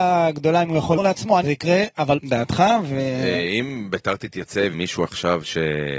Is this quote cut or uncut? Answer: cut